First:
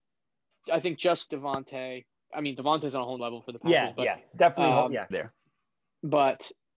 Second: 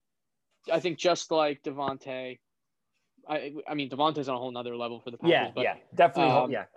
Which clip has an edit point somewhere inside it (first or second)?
first